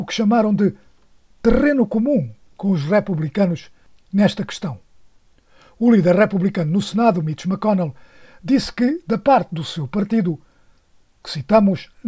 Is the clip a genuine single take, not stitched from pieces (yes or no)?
yes